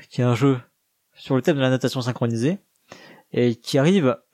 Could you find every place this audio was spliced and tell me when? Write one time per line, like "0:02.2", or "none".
none

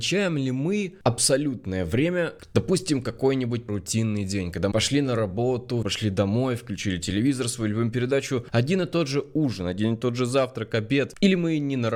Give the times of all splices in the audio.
0:03.7
0:04.7
0:05.8

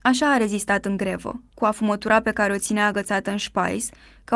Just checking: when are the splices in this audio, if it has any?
none

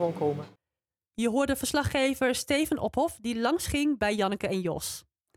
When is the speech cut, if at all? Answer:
none

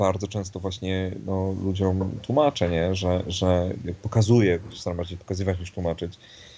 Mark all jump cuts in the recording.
none

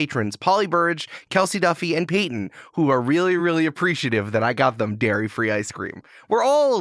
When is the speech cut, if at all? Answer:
none

